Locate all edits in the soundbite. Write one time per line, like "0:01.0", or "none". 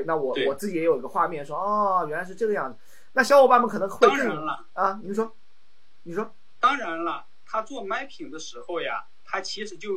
none